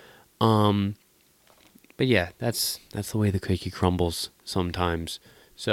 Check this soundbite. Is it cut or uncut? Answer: uncut